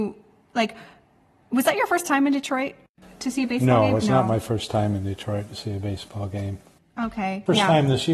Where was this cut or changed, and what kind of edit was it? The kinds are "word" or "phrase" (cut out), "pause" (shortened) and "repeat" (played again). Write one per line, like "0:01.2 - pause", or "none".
none